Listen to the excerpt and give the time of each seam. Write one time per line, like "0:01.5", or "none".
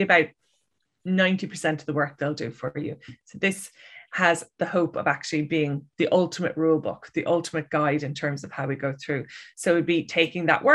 none